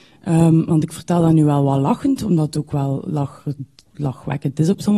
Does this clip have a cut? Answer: no; 0 cuts

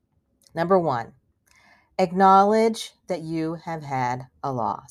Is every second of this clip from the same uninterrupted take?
yes; 0 cuts

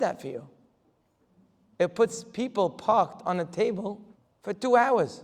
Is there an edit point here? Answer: yes; 1 cut; at 4.1 s

